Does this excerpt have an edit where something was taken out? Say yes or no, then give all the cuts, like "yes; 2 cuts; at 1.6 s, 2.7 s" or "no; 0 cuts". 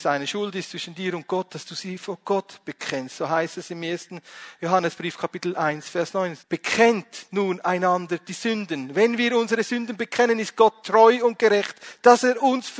yes; 1 cut; at 6.4 s